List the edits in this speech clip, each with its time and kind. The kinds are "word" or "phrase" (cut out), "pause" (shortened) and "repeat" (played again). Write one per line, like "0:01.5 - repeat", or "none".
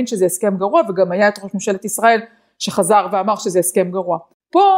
none